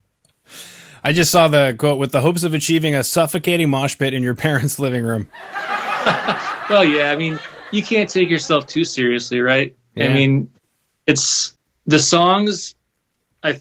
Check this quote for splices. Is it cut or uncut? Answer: uncut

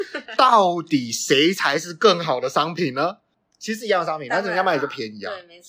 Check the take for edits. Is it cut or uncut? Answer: uncut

